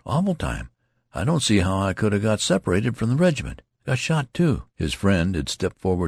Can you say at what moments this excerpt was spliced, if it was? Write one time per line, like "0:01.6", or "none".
0:04.7